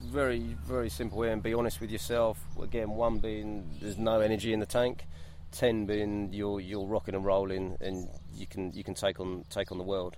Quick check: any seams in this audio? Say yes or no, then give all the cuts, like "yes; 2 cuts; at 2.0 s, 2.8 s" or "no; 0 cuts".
no; 0 cuts